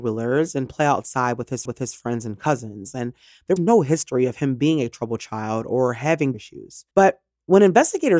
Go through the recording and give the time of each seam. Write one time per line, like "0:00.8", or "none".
0:01.7
0:03.6
0:06.3
0:06.9